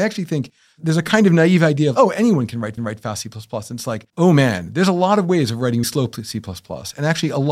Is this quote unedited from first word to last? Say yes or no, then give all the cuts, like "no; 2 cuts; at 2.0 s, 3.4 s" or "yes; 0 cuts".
no; 3 cuts; at 2.8 s, 4.1 s, 5.8 s